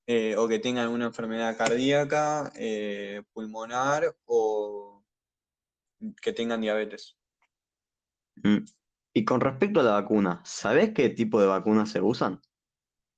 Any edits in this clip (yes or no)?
no